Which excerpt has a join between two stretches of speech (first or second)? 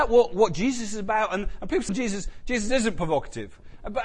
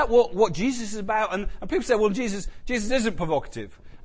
first